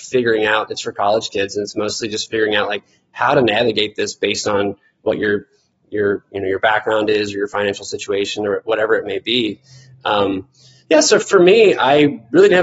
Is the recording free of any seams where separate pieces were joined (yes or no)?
yes